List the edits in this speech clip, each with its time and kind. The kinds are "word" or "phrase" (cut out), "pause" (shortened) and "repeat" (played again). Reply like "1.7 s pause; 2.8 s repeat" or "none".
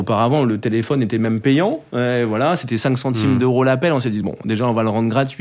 none